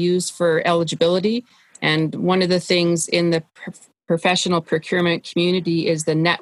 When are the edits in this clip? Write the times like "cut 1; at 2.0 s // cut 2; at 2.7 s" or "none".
none